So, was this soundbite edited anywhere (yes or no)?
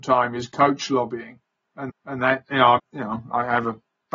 yes